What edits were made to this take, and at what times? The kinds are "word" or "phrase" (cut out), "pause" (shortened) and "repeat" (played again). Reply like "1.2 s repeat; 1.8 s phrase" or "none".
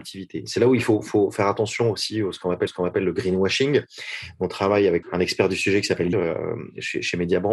2.7 s repeat; 5.0 s word; 6.1 s phrase